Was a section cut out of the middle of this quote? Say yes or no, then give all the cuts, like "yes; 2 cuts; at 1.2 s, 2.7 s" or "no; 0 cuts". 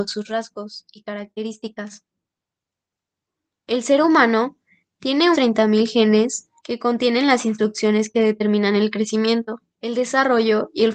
yes; 3 cuts; at 5.3 s, 6.6 s, 9.7 s